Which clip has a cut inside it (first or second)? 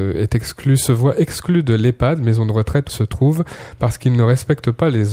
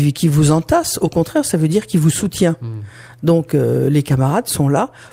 first